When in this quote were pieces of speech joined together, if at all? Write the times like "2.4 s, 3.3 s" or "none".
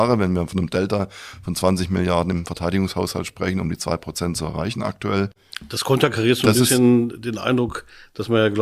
none